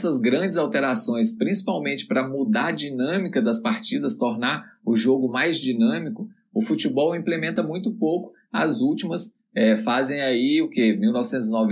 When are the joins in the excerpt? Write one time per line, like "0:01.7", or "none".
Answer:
none